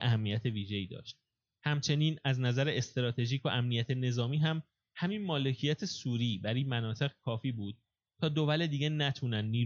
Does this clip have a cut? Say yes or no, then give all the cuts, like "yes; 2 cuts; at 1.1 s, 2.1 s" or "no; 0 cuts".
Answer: no; 0 cuts